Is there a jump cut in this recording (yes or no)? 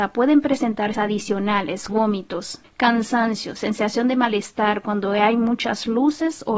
yes